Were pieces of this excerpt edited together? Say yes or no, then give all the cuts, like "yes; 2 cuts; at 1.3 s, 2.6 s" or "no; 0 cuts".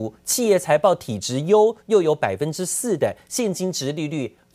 no; 0 cuts